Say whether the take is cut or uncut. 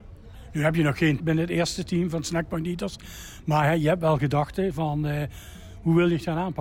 cut